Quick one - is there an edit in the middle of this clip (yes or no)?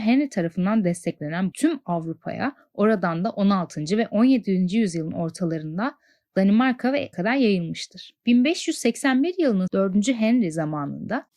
yes